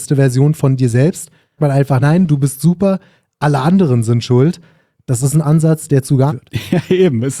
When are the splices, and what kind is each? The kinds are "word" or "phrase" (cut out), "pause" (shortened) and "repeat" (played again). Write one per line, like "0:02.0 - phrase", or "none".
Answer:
0:01.6 - word
0:02.0 - word
0:05.4 - word
0:06.3 - word